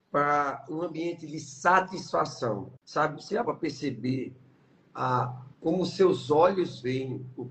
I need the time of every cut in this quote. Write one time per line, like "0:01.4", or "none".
0:02.8
0:03.4
0:05.5